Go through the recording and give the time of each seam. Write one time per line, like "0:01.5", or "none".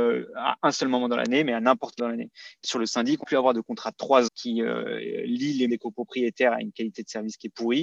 0:02.0
0:02.6
0:03.2
0:04.3
0:05.7

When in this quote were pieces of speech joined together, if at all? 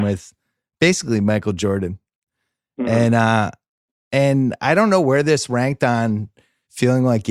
none

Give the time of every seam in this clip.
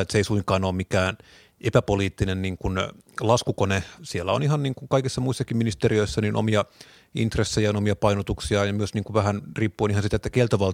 0:04.0

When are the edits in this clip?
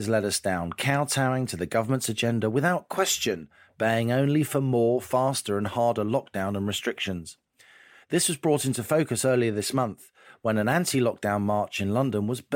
none

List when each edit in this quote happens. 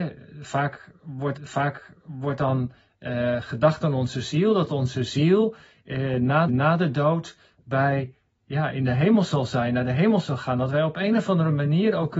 0:01.4
0:06.5

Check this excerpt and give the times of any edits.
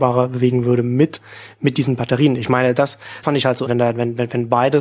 0:03.2
0:03.7

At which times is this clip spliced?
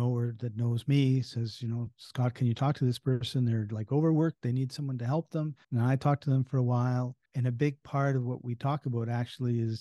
0:05.6
0:07.3

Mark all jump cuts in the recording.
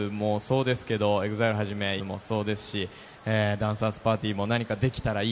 0:02.0

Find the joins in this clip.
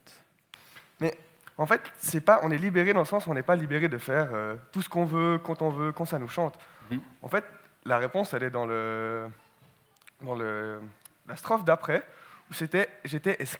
none

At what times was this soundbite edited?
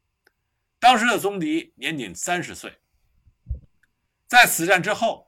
none

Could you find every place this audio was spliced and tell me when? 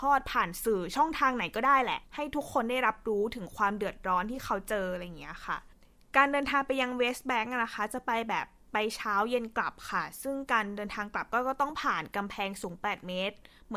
0:02.0

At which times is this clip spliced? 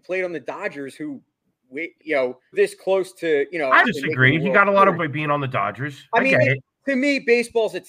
0:02.0
0:02.5
0:03.8
0:04.9

